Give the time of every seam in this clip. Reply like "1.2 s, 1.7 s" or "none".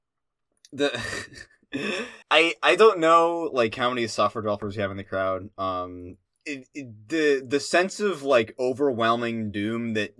2.2 s, 6.3 s